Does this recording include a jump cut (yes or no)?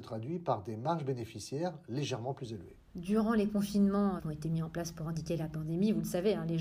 yes